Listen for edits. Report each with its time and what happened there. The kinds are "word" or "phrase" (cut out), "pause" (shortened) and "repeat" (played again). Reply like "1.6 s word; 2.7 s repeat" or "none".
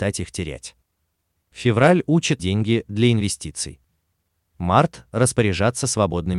2.4 s word